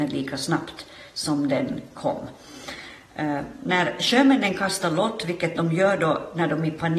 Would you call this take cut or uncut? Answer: uncut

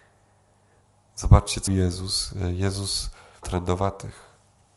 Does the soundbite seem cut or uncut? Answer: cut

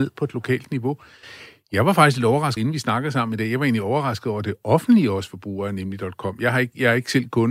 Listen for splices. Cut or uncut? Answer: cut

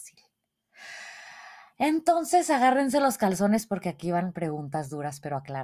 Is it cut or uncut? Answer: uncut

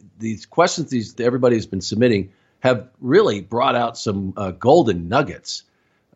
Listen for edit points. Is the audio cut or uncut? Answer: cut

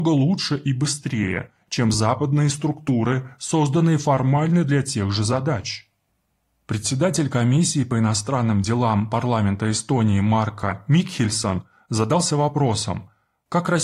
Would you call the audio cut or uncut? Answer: uncut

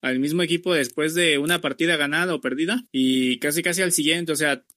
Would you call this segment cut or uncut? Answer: cut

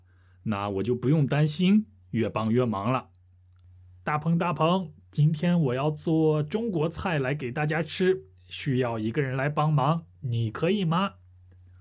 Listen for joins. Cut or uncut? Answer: cut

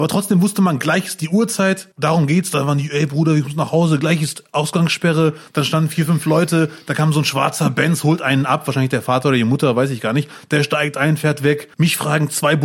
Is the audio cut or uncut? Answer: cut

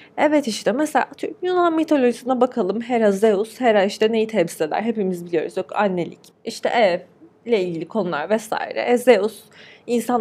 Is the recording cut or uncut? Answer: uncut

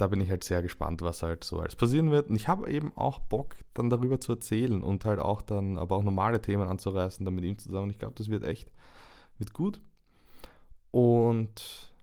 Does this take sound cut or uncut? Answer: uncut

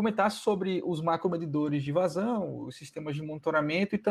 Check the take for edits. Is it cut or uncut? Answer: uncut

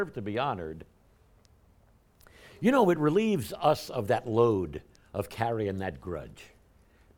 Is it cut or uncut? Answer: uncut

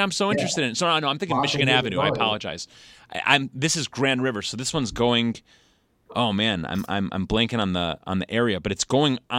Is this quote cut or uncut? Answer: uncut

